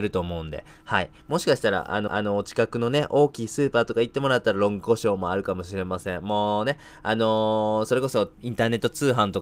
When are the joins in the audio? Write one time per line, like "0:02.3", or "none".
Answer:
0:02.1
0:08.3